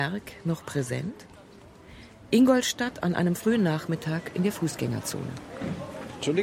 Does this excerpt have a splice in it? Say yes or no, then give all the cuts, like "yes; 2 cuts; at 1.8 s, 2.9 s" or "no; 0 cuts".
no; 0 cuts